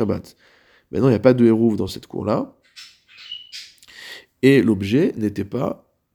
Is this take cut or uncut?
uncut